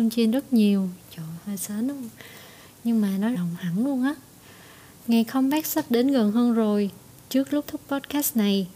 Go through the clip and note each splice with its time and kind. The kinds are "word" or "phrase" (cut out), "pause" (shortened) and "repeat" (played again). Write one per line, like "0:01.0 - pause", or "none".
0:03.3 - phrase
0:07.7 - word